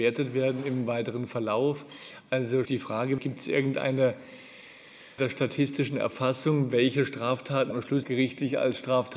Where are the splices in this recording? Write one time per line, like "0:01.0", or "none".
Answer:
0:02.6
0:03.2
0:05.2
0:07.7
0:08.0